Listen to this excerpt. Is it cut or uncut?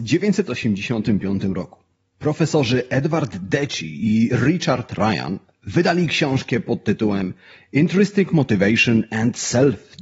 uncut